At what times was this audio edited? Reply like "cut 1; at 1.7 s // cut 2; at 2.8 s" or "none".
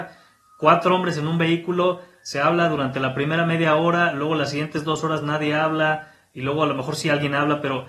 none